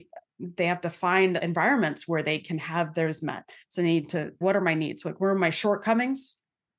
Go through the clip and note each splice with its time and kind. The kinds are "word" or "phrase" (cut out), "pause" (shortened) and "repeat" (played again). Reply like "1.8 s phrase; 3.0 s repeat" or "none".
1.4 s word; 3.2 s word; 4.4 s word